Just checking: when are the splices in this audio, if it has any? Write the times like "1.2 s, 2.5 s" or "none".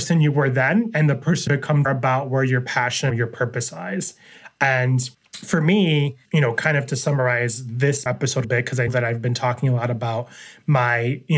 1.5 s, 1.8 s, 3.1 s, 5.1 s, 6.2 s, 8.1 s, 8.4 s, 8.9 s

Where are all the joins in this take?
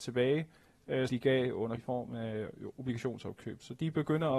1.1 s, 1.8 s

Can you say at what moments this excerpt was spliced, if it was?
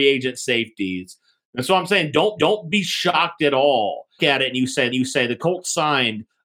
2.4 s, 4.2 s, 4.9 s

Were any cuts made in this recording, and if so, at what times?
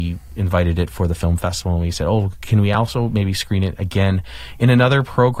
none

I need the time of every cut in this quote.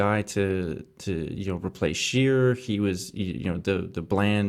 none

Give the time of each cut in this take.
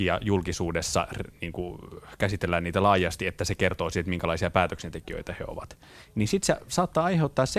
none

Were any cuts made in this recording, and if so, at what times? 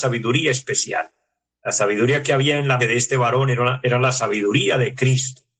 2.8 s

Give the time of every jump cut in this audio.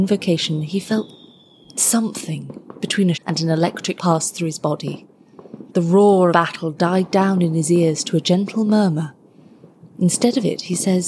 3.1 s, 4.0 s, 5.7 s, 6.3 s

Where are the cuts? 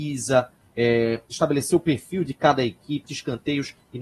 3.0 s

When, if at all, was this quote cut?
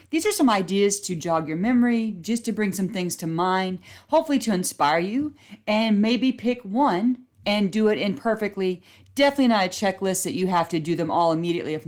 1.0 s

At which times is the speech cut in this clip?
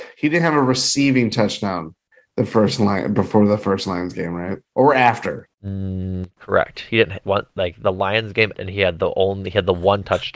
5.5 s, 7.2 s, 8.5 s

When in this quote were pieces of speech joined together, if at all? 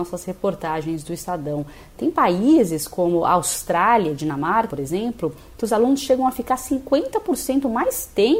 4.7 s

